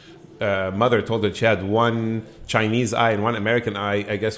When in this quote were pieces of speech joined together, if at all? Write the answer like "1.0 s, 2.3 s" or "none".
none